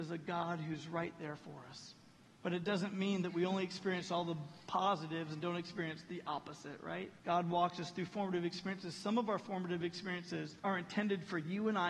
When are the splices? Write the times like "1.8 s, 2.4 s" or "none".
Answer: 2.2 s, 7.2 s, 10.6 s